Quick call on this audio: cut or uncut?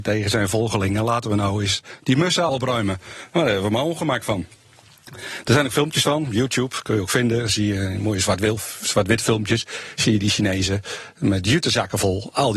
cut